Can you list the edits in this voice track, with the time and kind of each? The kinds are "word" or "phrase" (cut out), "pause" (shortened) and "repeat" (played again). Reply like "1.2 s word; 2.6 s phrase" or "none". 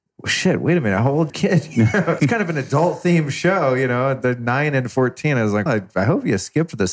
1.3 s word; 2.2 s word; 5.7 s word